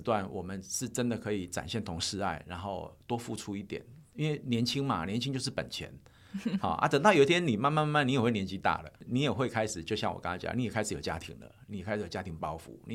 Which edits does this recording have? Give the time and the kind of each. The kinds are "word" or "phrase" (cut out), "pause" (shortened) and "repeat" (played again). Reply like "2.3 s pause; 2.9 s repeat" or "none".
9.0 s pause